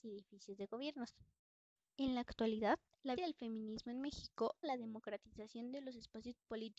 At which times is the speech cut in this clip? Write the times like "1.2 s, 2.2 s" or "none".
3.2 s, 4.6 s